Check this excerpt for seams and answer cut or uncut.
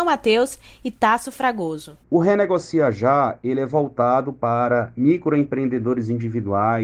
cut